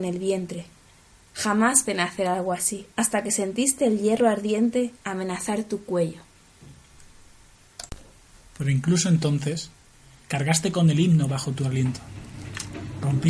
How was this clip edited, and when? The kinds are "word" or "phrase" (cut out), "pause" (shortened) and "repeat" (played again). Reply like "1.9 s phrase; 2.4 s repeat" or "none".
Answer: 1.9 s word; 2.9 s pause; 5.0 s pause